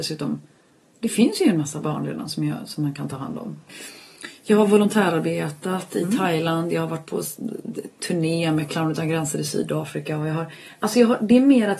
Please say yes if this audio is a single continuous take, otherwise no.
yes